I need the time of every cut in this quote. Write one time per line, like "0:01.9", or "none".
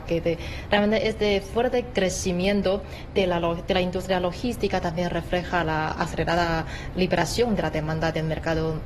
none